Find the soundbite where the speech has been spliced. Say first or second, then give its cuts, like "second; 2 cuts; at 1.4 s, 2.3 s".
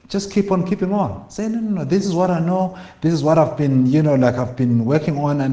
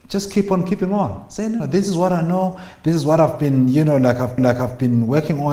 second; 2 cuts; at 1.6 s, 4.4 s